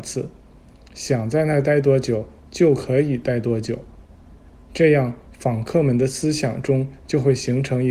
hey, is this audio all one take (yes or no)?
yes